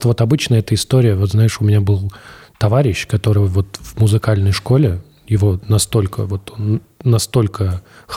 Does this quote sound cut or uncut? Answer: uncut